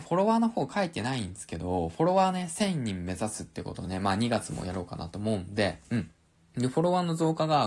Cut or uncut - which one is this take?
cut